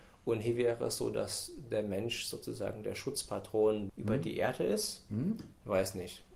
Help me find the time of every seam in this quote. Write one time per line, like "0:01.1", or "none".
0:03.9